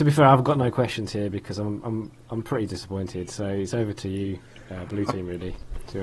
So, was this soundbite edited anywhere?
no; 0 cuts

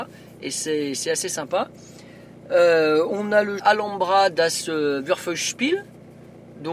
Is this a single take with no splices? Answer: no; 1 cut; at 3.6 s

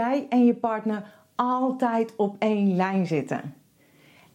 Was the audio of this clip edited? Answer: no; 0 cuts

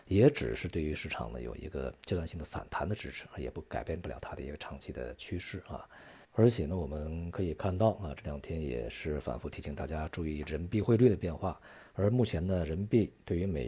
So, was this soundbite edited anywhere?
yes; 1 cut; at 6.2 s

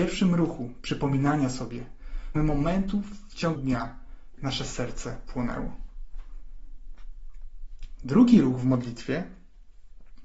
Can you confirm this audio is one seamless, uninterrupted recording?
no; 3 cuts; at 2.4 s, 3.6 s, 4.4 s

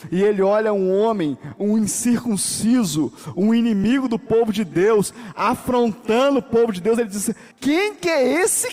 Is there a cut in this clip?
yes; 1 cut; at 7.5 s

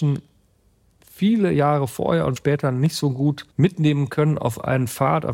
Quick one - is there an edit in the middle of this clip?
yes; 2 cuts; at 2.4 s, 3.5 s

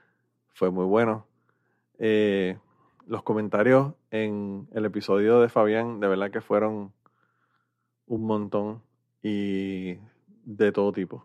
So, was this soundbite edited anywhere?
no; 0 cuts

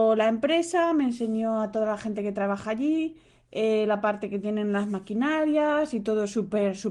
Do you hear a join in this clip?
no; 0 cuts

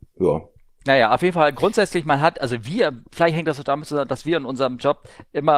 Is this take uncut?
yes; 0 cuts

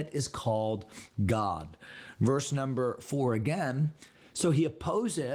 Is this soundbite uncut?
yes; 0 cuts

